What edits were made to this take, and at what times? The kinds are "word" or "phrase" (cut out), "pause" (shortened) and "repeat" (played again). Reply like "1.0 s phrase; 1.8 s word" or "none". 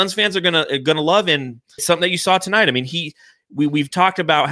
1.8 s word